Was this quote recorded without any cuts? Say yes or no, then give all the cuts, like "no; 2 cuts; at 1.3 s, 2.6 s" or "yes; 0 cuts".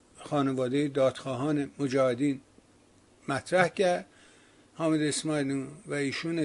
yes; 0 cuts